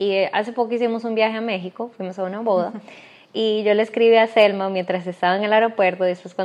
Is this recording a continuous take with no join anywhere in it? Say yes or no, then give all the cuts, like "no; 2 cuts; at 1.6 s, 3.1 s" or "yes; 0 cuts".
yes; 0 cuts